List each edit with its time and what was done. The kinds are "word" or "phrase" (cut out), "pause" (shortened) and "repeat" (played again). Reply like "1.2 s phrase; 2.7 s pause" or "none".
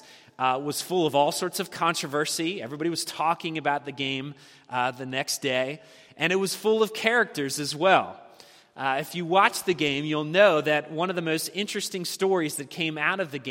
none